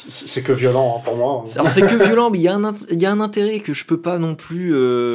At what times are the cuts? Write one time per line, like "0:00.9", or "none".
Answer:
none